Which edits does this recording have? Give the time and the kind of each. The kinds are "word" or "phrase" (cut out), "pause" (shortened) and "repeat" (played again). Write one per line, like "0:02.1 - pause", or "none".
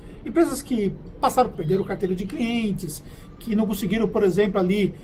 0:01.5 - phrase